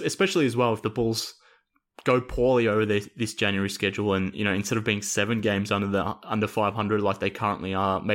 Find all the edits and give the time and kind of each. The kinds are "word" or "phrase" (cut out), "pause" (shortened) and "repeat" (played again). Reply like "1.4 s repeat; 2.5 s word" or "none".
none